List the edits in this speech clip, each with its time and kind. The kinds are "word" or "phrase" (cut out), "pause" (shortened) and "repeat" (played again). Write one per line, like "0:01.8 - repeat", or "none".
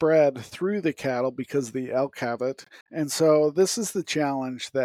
0:02.8 - pause